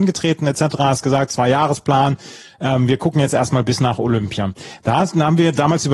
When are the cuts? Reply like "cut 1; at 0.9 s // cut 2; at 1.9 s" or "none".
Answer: none